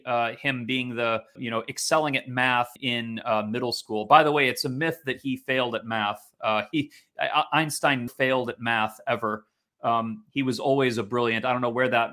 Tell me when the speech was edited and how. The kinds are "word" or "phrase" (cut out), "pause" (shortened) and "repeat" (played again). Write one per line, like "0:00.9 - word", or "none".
0:01.4 - word
0:02.8 - word
0:08.1 - word